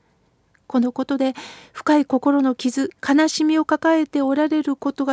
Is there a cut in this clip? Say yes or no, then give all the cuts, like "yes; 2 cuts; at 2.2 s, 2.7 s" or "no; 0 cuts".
yes; 1 cut; at 3.0 s